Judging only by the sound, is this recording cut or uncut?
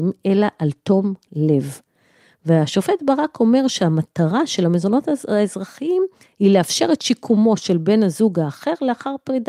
uncut